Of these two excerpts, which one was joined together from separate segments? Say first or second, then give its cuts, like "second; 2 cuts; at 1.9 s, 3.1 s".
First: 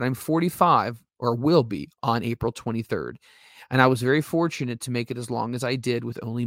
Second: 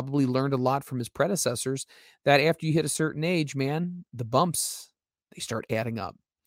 first; 1 cut; at 1.1 s